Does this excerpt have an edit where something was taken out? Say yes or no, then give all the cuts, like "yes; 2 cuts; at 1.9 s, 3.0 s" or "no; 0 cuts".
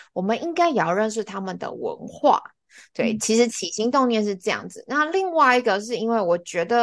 no; 0 cuts